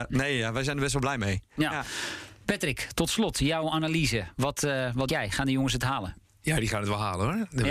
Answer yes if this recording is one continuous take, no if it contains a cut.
no